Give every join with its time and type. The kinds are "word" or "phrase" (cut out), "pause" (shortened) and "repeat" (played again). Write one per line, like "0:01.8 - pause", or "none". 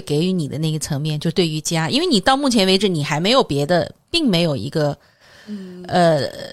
none